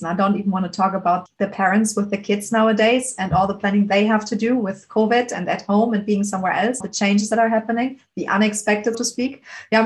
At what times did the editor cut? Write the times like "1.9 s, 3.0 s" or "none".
1.3 s, 6.8 s, 8.9 s

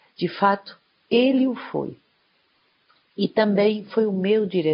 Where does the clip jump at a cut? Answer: none

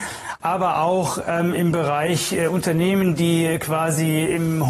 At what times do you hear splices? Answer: none

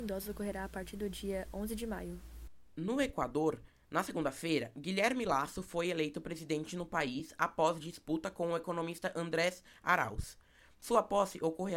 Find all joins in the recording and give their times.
none

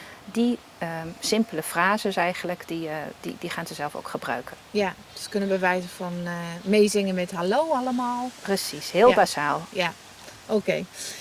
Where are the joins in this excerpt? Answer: none

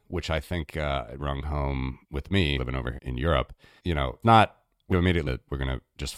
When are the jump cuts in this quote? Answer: 1.2 s, 2.0 s, 2.6 s, 3.0 s, 3.8 s, 4.2 s, 4.9 s, 5.3 s

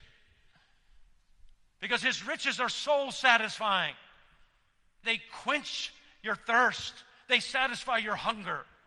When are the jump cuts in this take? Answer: 5.0 s

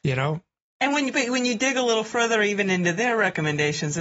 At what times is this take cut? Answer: none

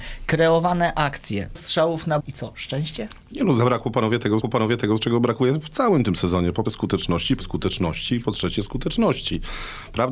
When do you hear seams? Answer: 1.5 s, 2.2 s, 4.4 s, 6.7 s, 7.4 s

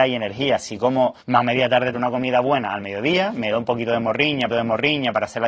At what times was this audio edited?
1.2 s, 1.9 s, 4.5 s

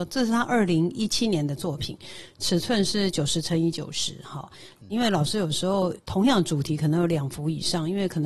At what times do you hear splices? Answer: 4.9 s

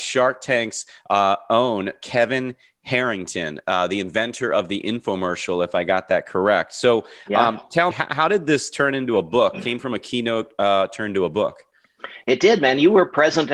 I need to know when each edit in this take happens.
7.9 s

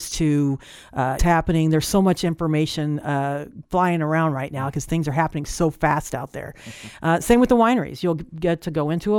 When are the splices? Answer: 1.2 s

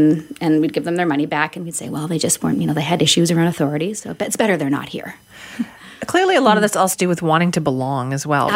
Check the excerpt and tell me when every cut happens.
6.9 s

